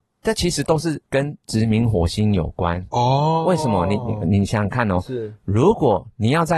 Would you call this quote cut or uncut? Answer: cut